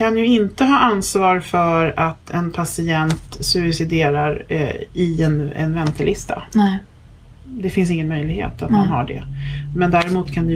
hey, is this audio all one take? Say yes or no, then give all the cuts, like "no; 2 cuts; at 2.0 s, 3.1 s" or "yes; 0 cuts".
yes; 0 cuts